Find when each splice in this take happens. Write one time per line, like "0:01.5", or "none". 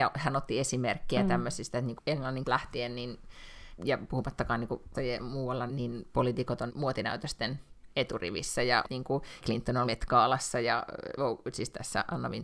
0:02.0
0:02.4
0:03.8
0:04.9
0:05.7
0:06.7
0:08.8
0:09.4
0:09.8